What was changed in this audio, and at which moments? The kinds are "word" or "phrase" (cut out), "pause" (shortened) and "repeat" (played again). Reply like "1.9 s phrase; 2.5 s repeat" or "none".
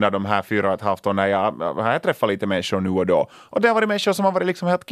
none